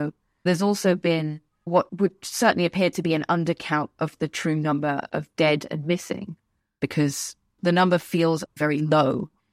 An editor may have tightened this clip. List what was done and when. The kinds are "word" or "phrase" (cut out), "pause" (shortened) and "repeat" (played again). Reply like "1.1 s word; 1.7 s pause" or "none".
8.5 s word